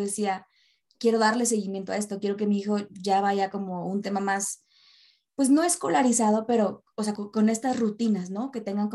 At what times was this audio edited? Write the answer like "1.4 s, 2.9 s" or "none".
7.2 s